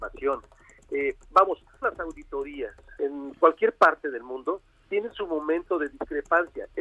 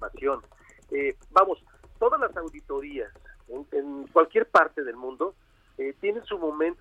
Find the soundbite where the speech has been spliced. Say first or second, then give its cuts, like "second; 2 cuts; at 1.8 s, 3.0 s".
first; 3 cuts; at 1.8 s, 3.0 s, 4.8 s